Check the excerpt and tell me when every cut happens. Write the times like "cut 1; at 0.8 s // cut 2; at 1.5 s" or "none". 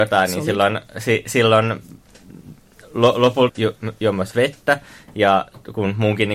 cut 1; at 3.5 s